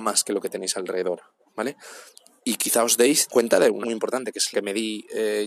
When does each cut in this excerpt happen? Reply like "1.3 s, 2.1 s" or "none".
3.3 s, 3.8 s, 4.5 s